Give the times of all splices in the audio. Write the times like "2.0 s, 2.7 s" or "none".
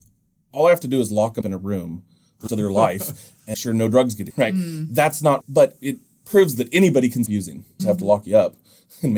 1.4 s, 2.5 s, 3.5 s, 4.3 s, 5.4 s, 7.3 s, 7.8 s